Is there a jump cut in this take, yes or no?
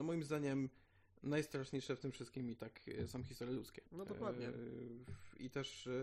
yes